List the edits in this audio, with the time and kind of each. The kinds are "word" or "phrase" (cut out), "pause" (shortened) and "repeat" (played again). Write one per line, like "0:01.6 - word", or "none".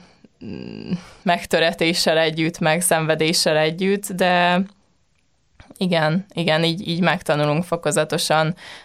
none